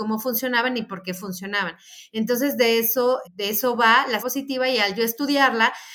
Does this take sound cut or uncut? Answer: cut